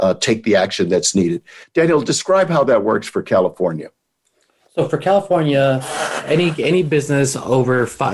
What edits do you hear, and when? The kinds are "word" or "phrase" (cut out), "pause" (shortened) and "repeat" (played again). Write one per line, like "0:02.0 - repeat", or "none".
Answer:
none